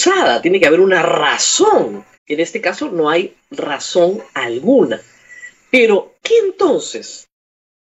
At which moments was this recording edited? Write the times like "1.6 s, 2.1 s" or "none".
2.1 s, 4.3 s, 6.2 s